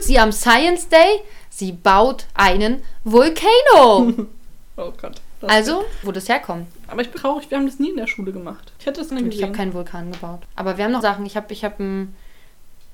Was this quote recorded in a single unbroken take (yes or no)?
no